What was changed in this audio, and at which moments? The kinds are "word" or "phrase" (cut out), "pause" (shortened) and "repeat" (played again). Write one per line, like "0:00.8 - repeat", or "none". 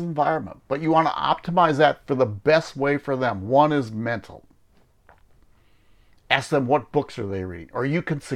none